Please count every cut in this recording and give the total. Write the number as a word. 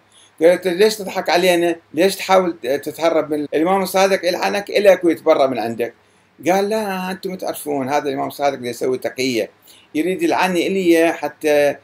two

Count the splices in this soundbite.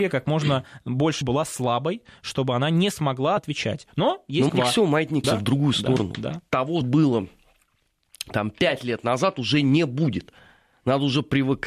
five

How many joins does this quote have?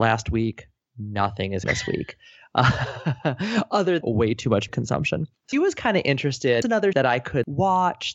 six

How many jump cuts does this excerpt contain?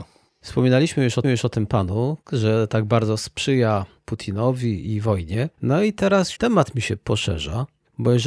four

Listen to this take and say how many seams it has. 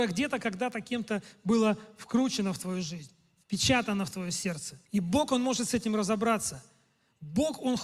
one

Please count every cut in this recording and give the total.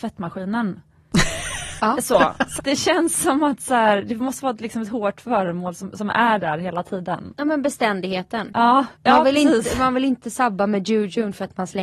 two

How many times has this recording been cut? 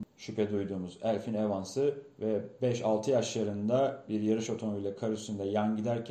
zero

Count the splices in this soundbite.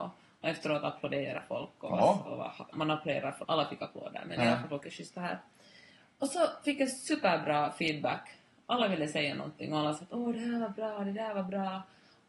two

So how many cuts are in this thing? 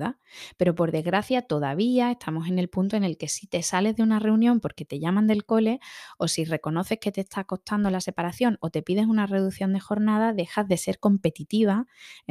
zero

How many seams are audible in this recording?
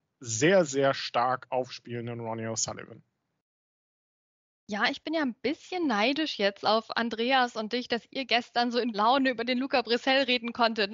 one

